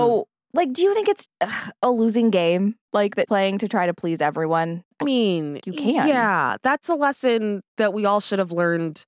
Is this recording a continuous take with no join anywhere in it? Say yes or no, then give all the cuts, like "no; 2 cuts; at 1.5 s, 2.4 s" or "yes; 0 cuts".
no; 6 cuts; at 1.3 s, 2.8 s, 3.2 s, 5.0 s, 5.6 s, 7.7 s